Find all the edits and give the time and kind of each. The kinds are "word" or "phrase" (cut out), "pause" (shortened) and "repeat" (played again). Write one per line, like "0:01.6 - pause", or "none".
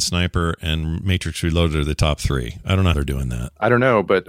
0:02.9 - word